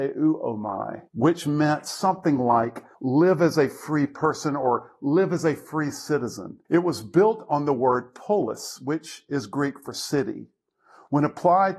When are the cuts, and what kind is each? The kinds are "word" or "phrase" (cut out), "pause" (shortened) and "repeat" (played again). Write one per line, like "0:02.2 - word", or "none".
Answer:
0:01.1 - pause
0:02.9 - pause
0:06.6 - pause